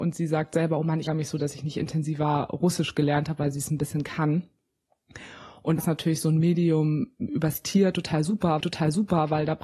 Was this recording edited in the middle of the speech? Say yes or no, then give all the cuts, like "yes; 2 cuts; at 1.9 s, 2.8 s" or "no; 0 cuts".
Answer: yes; 3 cuts; at 1.1 s, 5.8 s, 8.6 s